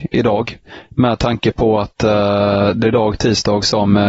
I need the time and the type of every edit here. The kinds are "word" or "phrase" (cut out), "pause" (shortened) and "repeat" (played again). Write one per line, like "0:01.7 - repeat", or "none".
0:02.8 - word